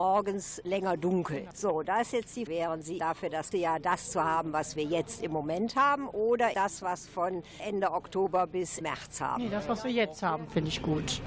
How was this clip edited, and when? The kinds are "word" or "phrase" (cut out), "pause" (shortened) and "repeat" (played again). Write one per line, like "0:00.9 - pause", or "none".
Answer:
0:02.5 - word
0:03.0 - word
0:03.5 - word
0:06.5 - word
0:07.1 - word
0:08.8 - word